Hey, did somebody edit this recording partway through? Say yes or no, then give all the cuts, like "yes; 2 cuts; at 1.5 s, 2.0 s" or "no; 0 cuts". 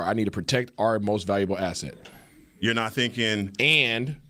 no; 0 cuts